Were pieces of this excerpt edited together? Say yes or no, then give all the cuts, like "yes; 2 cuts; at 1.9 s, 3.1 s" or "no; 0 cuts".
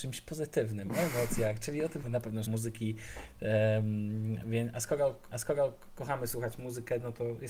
yes; 3 cuts; at 2.0 s, 2.4 s, 5.3 s